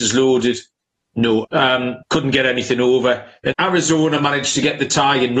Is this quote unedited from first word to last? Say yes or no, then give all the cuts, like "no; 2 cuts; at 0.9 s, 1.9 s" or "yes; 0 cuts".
no; 3 cuts; at 1.4 s, 2.0 s, 3.5 s